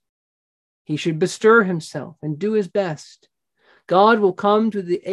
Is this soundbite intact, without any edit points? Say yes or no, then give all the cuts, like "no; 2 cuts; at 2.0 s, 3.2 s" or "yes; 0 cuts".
yes; 0 cuts